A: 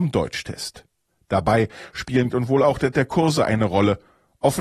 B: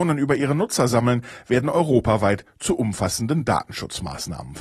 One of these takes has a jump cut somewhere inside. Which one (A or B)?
A